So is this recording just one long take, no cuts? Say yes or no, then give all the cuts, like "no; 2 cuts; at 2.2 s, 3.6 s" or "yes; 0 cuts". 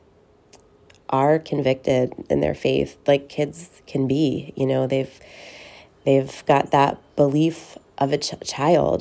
yes; 0 cuts